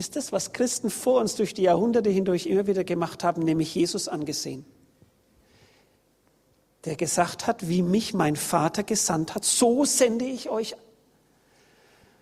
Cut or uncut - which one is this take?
uncut